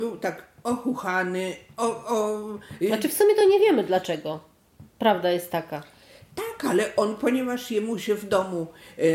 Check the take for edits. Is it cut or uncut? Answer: uncut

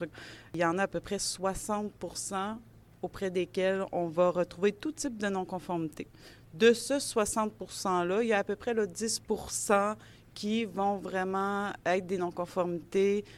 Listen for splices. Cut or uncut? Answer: uncut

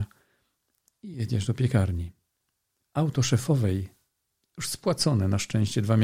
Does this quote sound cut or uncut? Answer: uncut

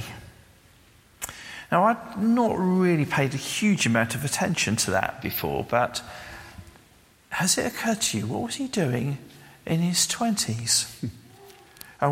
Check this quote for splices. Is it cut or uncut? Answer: uncut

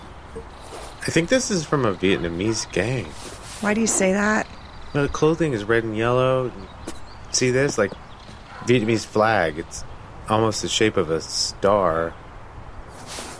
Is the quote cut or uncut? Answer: uncut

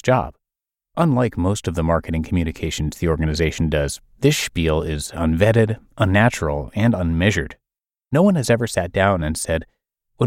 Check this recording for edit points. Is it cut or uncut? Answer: uncut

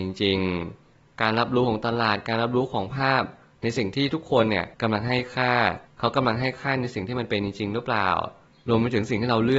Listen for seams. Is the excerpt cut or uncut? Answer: cut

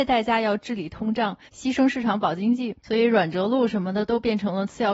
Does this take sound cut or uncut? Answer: cut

